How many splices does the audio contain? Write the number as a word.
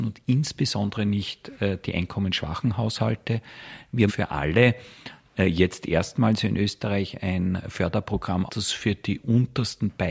two